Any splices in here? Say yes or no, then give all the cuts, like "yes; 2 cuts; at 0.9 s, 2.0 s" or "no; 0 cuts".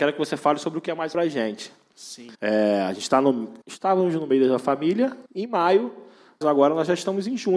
yes; 5 cuts; at 1.1 s, 2.3 s, 3.6 s, 5.3 s, 6.4 s